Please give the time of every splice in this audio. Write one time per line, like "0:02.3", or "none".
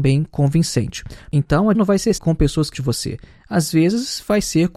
0:01.7
0:02.2
0:02.7